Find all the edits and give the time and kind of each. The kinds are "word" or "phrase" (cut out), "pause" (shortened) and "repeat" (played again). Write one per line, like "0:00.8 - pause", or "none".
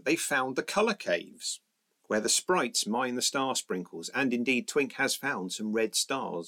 none